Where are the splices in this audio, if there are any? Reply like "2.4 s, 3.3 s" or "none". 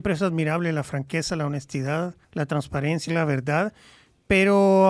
2.2 s, 3.1 s